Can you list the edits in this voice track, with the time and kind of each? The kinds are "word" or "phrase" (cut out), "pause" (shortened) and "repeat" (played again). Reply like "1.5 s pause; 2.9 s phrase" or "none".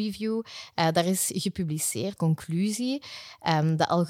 2.2 s word

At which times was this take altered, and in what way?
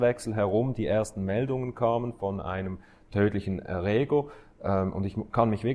none

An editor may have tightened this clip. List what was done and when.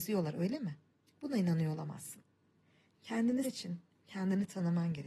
1.1 s pause; 3.4 s word

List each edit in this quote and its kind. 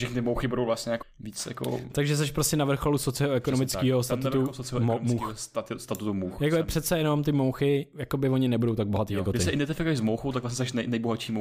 1.0 s word

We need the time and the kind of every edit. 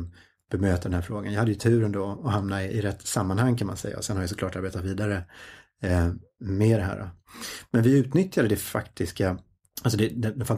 9.6 s pause

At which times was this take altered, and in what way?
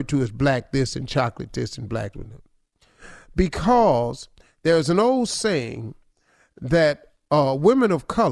2.1 s word

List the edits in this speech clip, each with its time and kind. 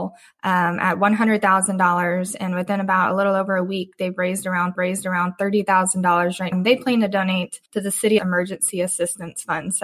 4.7 s repeat; 6.5 s word; 7.7 s pause; 8.2 s phrase

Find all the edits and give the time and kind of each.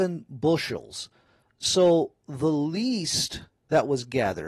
none

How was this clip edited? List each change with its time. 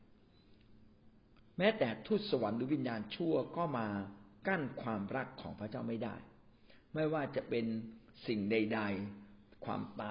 none

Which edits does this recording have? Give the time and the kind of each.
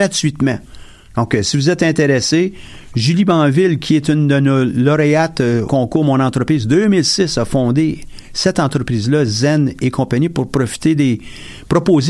5.7 s word

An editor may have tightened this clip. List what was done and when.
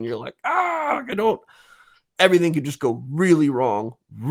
none

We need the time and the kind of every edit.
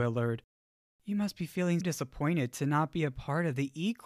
1.8 s word

